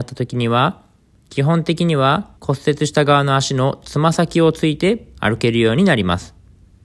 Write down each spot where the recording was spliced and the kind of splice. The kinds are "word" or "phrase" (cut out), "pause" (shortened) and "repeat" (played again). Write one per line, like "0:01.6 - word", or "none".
0:02.4 - pause

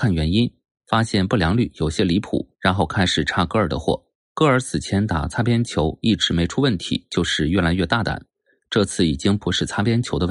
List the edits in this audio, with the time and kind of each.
0:02.5 - pause
0:04.2 - pause

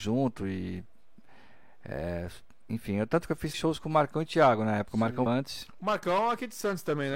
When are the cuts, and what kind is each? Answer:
0:03.5 - word
0:05.3 - word

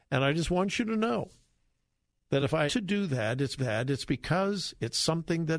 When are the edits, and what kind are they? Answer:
0:02.7 - word
0:03.6 - repeat

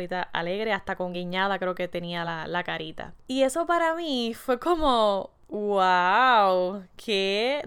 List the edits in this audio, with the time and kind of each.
none

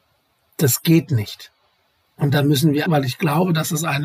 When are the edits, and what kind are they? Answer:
0:02.9 - word

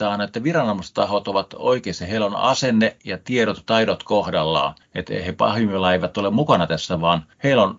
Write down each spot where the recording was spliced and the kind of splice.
none

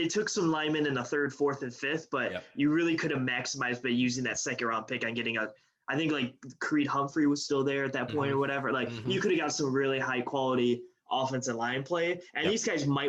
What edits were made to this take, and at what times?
none

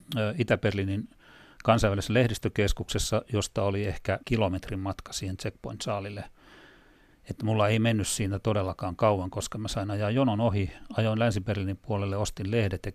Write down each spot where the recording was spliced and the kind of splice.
0:04.2 - pause

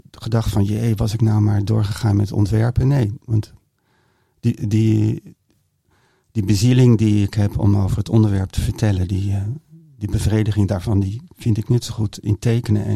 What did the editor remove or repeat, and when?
none

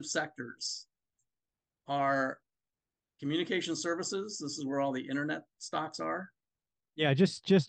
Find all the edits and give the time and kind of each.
none

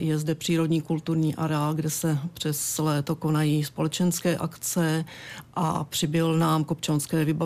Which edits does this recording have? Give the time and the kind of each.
none

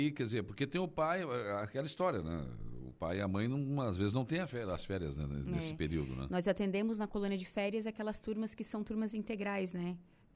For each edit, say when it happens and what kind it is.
none

